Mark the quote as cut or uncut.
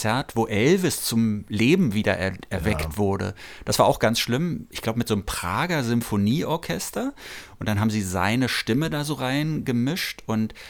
uncut